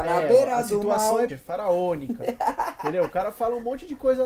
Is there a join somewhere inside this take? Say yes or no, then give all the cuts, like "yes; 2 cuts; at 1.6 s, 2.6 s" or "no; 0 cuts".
yes; 1 cut; at 1.3 s